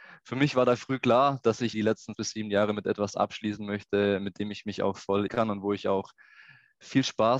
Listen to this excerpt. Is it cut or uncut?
cut